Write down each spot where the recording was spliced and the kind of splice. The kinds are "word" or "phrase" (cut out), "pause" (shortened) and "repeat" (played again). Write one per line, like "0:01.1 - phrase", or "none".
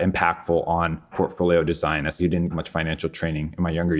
0:01.1 - word
0:02.2 - word
0:02.5 - word